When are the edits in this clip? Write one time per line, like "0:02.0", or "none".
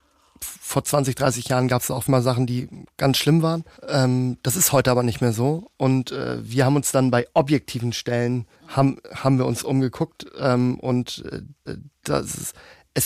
0:02.1
0:03.8
0:08.6
0:11.7